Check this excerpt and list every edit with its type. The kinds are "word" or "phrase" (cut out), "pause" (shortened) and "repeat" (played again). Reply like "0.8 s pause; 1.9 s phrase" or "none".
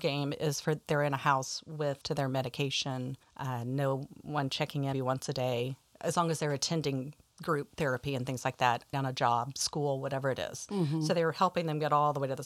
2.0 s word; 3.2 s pause; 4.9 s word; 8.9 s word